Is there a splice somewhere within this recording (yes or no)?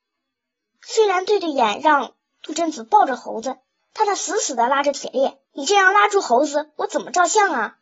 yes